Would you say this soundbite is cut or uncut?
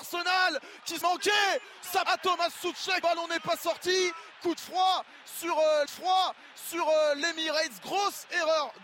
cut